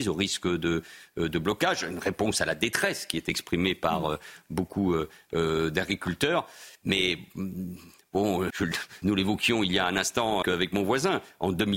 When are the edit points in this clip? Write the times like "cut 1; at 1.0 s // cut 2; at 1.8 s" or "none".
cut 1; at 8.5 s // cut 2; at 9.0 s // cut 3; at 10.4 s